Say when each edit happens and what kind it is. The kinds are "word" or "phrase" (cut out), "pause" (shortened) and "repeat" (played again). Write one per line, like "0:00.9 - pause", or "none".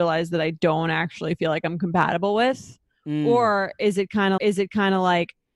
0:04.4 - repeat